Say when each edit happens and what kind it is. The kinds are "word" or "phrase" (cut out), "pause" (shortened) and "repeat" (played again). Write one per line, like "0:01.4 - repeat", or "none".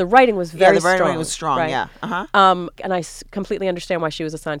0:02.7 - pause